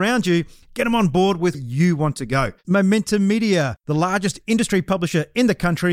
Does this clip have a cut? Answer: yes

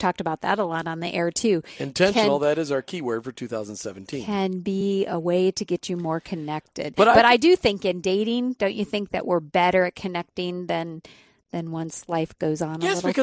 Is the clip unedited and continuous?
yes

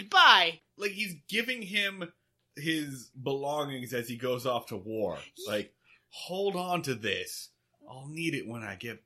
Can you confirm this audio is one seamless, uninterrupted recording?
yes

